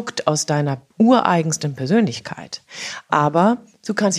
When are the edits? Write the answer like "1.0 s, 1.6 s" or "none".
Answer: 0.9 s